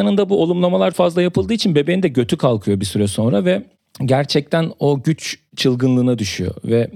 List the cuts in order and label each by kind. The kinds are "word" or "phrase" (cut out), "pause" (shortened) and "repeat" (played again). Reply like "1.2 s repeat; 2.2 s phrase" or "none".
0.9 s word